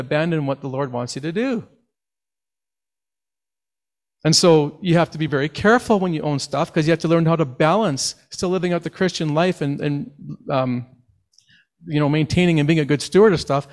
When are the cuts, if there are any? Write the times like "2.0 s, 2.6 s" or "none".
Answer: none